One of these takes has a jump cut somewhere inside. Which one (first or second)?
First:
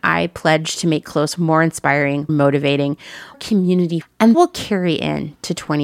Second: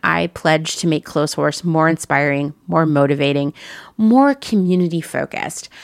first